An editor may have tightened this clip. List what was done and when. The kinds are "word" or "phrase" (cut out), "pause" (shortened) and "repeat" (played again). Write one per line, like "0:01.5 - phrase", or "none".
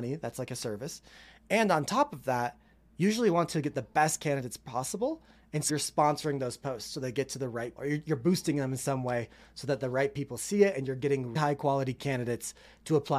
0:05.7 - word
0:07.8 - word
0:11.4 - word

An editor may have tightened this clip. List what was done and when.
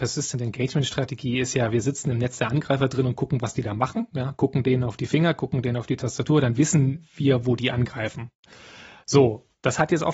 none

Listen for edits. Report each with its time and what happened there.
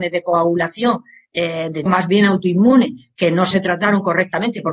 0:01.9 - word

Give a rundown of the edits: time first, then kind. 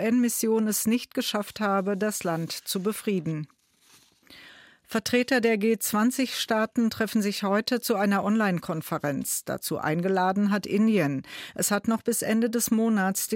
none

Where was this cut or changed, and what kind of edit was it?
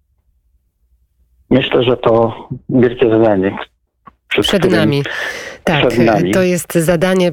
none

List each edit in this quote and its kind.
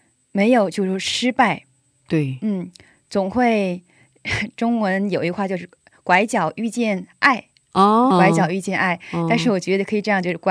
0:08.1 - word

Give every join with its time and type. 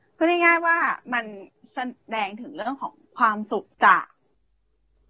0:01.5 - pause
0:03.7 - pause

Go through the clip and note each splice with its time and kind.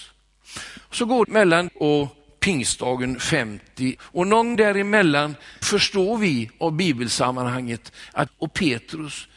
0:01.2 - word
0:01.7 - word
0:04.0 - word
0:04.6 - word
0:05.6 - word
0:08.3 - word

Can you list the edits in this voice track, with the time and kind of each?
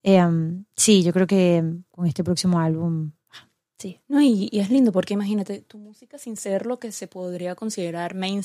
0:04.0 - pause

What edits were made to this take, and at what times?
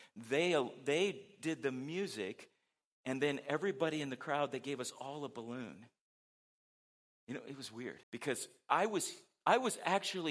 0:08.0 - pause

